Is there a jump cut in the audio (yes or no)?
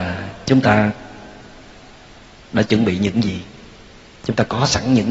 no